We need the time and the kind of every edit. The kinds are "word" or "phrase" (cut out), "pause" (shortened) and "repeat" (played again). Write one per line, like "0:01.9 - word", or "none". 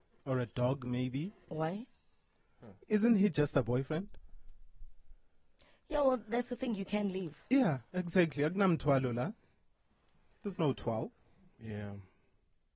0:02.8 - pause

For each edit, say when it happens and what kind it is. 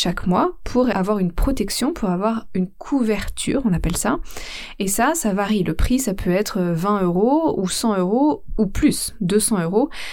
none

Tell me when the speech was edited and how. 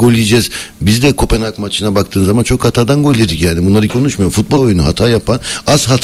0:03.9 - word
0:04.6 - word

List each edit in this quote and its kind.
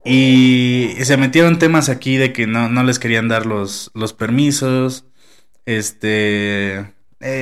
none

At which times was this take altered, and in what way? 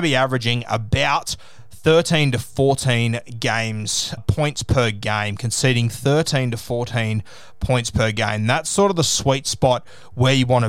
0:04.2 - word

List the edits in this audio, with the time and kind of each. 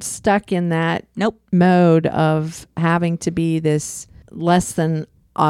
none

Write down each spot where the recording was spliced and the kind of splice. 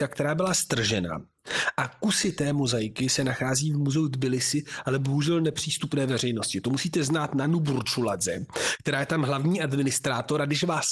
none

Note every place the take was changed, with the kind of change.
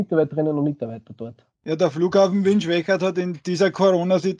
0:01.5 - pause

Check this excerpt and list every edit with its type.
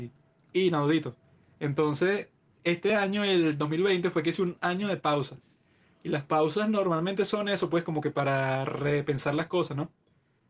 none

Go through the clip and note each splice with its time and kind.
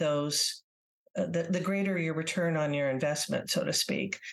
none

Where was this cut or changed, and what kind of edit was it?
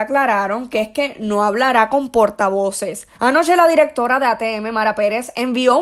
0:03.1 - pause

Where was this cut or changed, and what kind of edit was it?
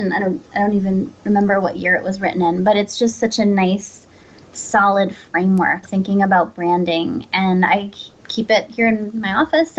0:05.8 - word

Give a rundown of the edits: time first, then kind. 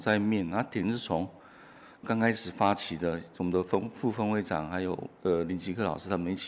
none

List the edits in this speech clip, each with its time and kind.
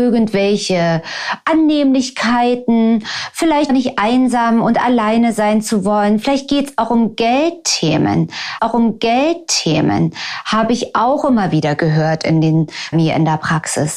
0:03.7 - word
0:08.6 - repeat
0:12.9 - phrase

